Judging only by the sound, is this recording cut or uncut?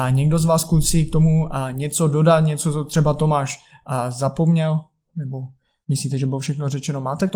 uncut